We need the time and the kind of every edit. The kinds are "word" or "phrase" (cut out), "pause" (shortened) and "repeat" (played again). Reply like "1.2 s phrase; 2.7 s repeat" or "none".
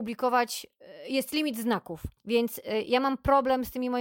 2.2 s pause